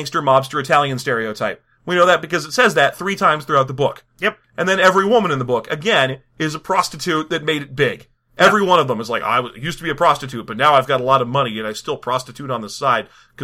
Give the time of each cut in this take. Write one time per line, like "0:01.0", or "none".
0:04.4